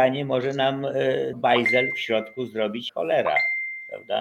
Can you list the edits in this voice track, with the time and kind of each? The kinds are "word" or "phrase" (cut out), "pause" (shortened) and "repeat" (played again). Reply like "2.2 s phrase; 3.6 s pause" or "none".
1.3 s word; 2.9 s word